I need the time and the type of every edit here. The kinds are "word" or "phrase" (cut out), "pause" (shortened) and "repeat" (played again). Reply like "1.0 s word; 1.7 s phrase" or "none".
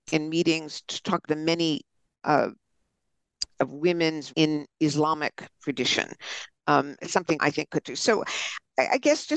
1.2 s word; 3.6 s word; 4.3 s word; 7.0 s word; 7.4 s word; 7.8 s word